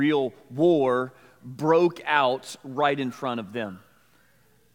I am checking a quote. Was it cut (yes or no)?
no